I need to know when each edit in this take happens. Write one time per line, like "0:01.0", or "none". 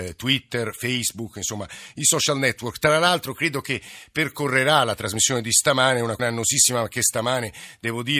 0:06.2